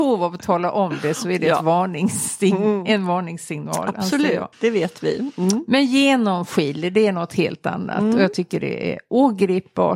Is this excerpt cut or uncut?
cut